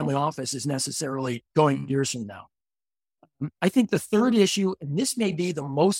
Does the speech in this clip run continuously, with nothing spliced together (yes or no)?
no